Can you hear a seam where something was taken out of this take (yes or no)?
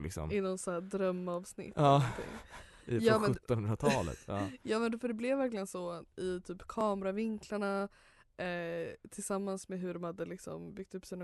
no